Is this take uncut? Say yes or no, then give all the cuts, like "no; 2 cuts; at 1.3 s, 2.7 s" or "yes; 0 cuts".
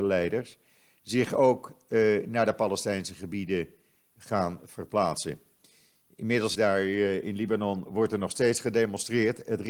no; 1 cut; at 6.6 s